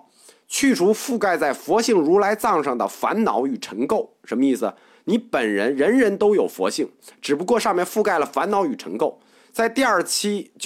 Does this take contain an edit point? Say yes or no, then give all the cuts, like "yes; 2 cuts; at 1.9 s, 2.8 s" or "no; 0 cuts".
no; 0 cuts